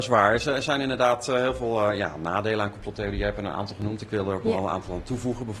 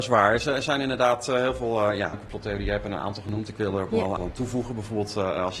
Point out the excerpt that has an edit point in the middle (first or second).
second